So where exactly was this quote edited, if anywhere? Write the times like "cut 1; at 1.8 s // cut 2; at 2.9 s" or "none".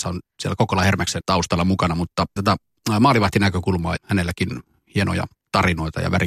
cut 1; at 1.2 s // cut 2; at 2.4 s // cut 3; at 4.0 s